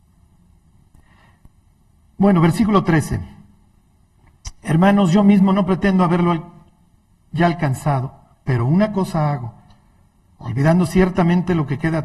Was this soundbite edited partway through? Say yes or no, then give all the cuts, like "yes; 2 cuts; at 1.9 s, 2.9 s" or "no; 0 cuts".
no; 0 cuts